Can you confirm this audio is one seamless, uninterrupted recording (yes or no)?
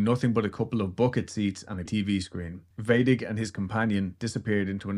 no